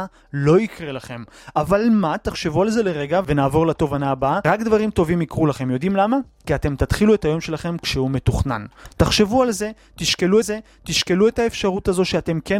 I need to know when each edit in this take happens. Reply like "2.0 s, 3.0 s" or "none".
10.4 s